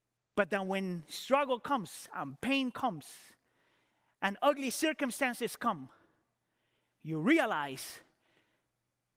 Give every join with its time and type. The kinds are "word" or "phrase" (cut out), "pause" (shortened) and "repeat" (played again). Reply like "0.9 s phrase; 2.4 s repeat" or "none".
none